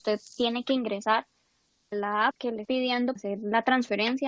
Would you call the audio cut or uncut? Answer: cut